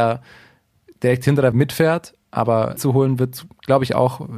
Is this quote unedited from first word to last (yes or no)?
no